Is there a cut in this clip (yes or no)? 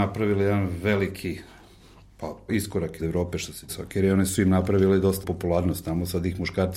yes